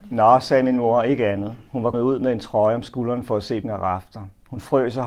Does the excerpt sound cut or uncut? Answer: cut